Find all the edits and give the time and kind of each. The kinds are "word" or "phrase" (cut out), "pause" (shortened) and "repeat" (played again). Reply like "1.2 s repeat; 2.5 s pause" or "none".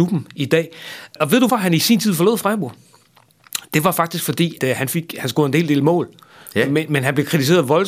1.5 s word; 4.6 s word